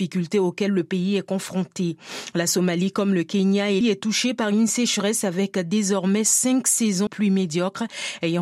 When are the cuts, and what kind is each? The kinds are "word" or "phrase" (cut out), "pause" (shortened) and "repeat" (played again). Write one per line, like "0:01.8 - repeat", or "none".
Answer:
0:03.8 - word
0:07.1 - word